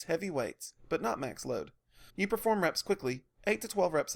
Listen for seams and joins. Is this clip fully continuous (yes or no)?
no